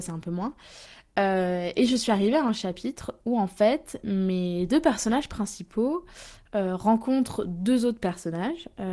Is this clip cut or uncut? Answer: uncut